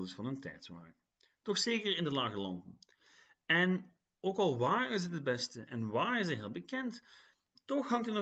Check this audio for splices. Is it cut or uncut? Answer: uncut